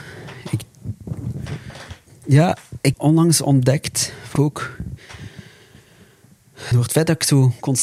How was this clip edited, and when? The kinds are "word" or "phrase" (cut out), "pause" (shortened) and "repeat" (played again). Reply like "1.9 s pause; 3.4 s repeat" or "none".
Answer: 2.9 s word; 4.4 s word; 6.7 s word